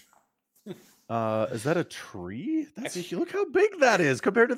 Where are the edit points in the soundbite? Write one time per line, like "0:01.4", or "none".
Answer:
none